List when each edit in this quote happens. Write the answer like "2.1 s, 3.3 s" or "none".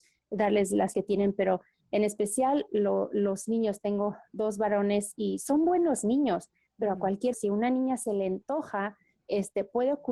0.9 s, 7.3 s